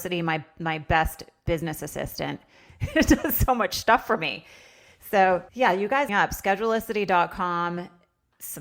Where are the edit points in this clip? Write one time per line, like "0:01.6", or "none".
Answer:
0:05.5
0:06.1